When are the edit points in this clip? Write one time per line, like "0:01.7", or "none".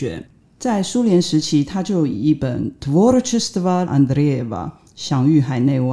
0:03.9